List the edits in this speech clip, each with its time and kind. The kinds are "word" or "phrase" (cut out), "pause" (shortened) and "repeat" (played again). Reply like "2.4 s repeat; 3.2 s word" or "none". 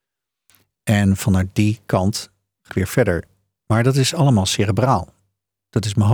2.7 s word